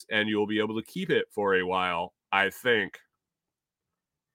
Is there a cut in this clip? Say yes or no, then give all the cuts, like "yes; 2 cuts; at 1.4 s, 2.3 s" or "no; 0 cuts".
yes; 1 cut; at 2.2 s